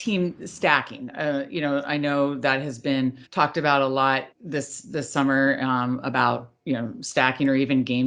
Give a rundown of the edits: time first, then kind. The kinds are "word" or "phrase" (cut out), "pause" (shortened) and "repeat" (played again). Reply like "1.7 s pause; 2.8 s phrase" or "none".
3.3 s pause; 4.3 s pause